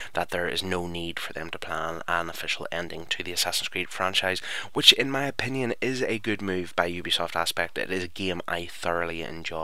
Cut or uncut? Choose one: uncut